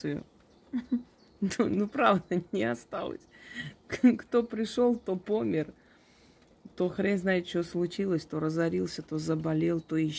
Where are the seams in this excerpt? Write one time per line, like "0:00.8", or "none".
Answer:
none